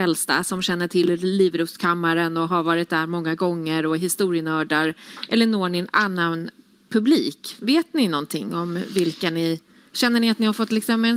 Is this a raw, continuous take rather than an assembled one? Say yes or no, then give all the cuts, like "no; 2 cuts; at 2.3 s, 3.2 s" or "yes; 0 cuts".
yes; 0 cuts